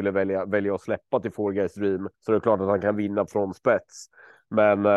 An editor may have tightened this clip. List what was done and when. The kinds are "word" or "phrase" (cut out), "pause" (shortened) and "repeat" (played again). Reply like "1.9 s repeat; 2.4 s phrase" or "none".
2.1 s pause; 3.3 s word